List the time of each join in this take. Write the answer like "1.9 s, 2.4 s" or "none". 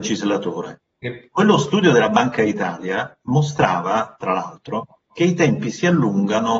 1.3 s, 5.1 s